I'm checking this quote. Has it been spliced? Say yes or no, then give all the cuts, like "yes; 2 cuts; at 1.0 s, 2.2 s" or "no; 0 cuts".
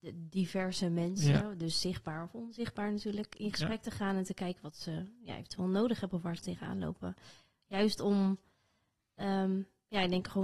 no; 0 cuts